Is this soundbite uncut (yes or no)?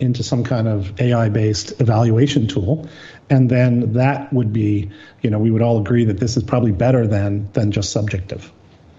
yes